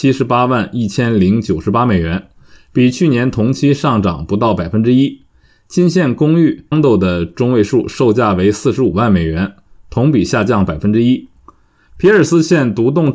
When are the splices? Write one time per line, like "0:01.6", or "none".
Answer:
0:06.7